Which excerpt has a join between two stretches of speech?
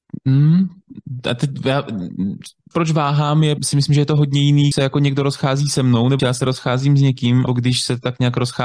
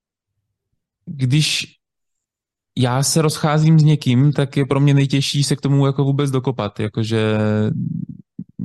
first; 5 cuts; at 2.7 s, 3.6 s, 4.7 s, 6.2 s, 7.5 s

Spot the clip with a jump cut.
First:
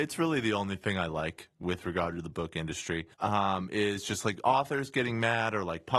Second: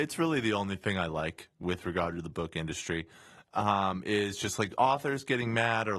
first; 1 cut; at 3.1 s

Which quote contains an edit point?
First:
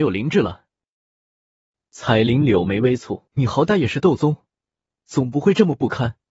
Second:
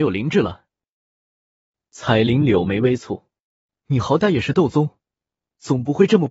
first; 1 cut; at 3.3 s

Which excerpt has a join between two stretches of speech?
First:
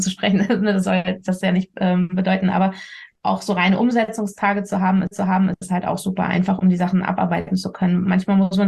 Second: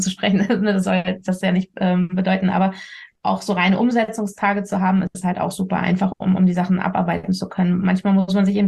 first; 2 cuts; at 5.1 s, 6.6 s

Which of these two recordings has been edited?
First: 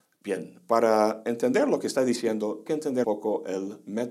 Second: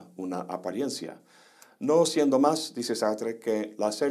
first; 2 cuts; at 2.7 s, 3.0 s

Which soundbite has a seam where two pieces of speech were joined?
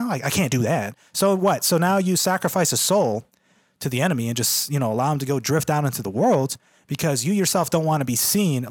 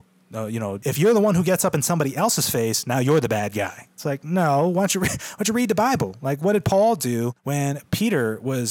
second; 1 cut; at 7.4 s

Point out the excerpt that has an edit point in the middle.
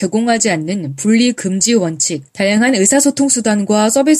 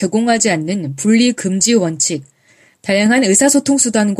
first; 1 cut; at 2.3 s

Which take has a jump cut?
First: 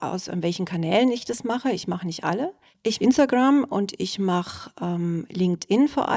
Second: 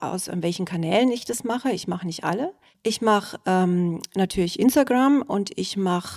first; 1 cut; at 3.0 s

